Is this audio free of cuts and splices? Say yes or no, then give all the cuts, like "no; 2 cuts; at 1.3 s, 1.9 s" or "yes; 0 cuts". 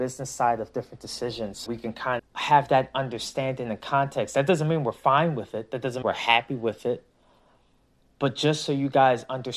no; 3 cuts; at 1.7 s, 2.2 s, 6.0 s